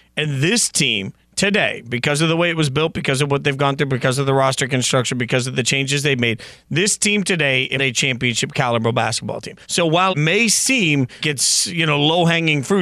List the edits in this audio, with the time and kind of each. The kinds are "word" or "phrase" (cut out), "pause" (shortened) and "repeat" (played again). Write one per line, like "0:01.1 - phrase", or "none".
0:07.8 - phrase
0:09.6 - pause
0:10.1 - word
0:11.2 - word